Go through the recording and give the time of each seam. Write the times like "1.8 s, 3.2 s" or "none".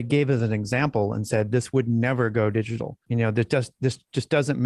3.0 s